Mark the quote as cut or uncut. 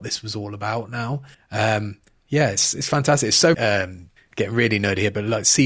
cut